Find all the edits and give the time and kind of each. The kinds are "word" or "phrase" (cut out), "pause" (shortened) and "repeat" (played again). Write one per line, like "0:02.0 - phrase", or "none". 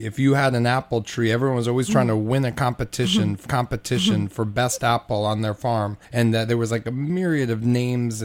0:03.5 - repeat
0:06.0 - pause